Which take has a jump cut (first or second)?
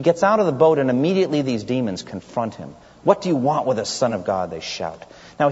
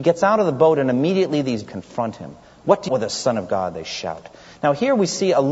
second